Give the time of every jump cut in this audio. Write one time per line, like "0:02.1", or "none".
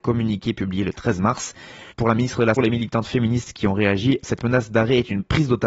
0:01.9
0:02.6
0:04.2